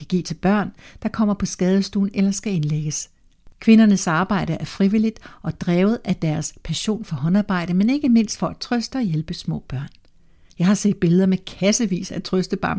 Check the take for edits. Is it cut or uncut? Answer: uncut